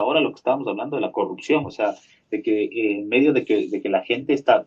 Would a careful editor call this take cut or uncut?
uncut